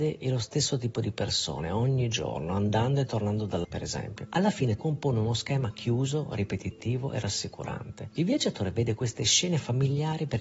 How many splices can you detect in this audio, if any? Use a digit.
2